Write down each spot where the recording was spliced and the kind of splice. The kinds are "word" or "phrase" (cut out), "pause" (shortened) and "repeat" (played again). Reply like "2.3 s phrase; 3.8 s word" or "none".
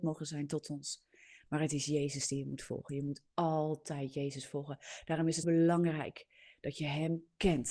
5.4 s word

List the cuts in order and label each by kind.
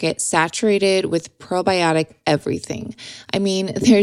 none

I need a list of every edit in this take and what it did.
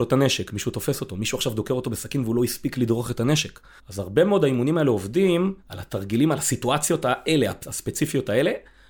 3.8 s pause; 5.6 s pause

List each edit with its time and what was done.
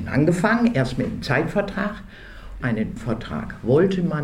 2.6 s word; 3.0 s word

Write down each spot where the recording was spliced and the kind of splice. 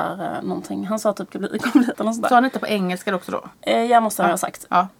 1.3 s word; 1.9 s word; 3.5 s pause

